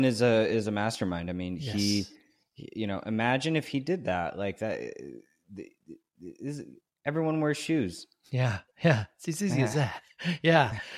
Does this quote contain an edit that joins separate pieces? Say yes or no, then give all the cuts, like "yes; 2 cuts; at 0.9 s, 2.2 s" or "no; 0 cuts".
no; 0 cuts